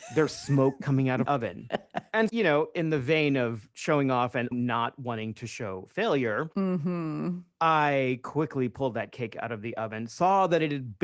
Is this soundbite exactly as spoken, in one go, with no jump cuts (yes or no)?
no